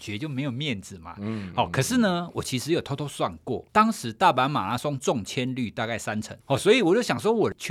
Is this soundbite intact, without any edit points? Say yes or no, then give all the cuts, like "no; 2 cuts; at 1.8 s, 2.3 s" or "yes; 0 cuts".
no; 2 cuts; at 3.7 s, 6.4 s